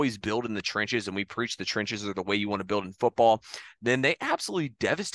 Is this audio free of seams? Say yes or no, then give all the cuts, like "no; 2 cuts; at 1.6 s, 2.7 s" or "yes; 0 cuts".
yes; 0 cuts